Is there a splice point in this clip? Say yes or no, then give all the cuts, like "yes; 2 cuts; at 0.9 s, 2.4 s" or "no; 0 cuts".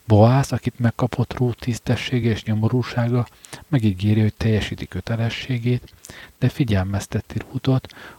no; 0 cuts